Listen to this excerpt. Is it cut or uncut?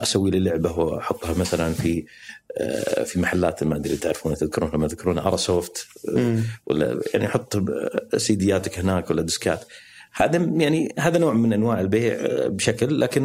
uncut